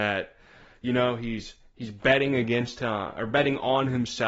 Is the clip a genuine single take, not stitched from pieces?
yes; 0 cuts

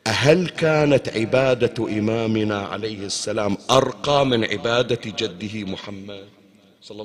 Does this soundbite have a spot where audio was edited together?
no; 0 cuts

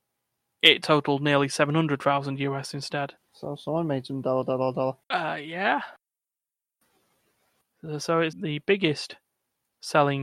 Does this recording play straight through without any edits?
no; 3 cuts; at 3.2 s, 5.0 s, 8.3 s

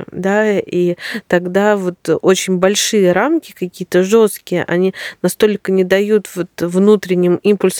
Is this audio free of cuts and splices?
yes; 0 cuts

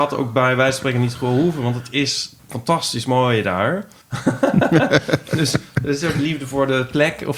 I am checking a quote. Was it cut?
yes; 2 cuts; at 2.4 s, 4.0 s

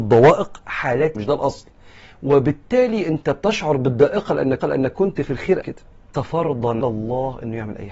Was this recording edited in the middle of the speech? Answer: yes; 5 cuts; at 1.1 s, 4.6 s, 5.6 s, 6.1 s, 6.8 s

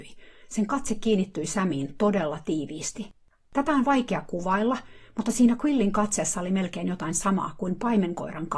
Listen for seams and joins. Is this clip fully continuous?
yes; 0 cuts

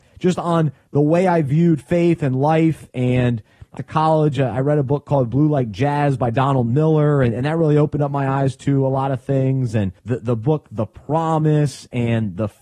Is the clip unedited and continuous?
no; 2 cuts; at 3.8 s, 10.0 s

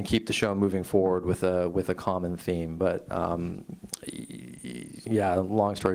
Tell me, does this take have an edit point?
no; 0 cuts

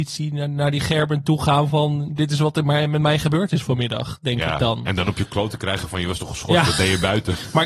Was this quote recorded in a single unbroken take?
yes; 0 cuts

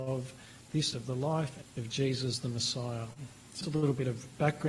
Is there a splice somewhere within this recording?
yes; 3 cuts; at 0.9 s, 1.6 s, 3.6 s

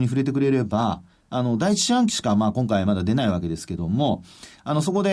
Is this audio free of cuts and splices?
yes; 0 cuts

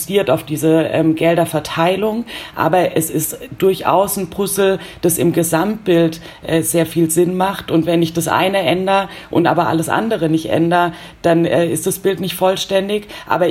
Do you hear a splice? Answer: no; 0 cuts

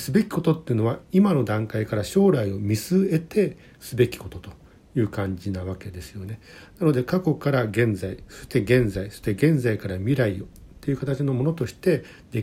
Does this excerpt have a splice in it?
no; 0 cuts

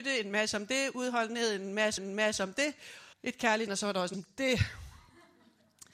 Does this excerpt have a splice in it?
yes; 4 cuts; at 2.0 s, 3.1 s, 3.7 s, 4.1 s

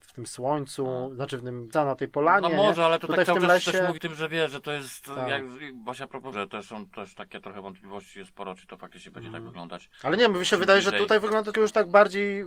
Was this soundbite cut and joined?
yes; 5 cuts; at 1.7 s, 4.0 s, 6.3 s, 9.9 s, 11.5 s

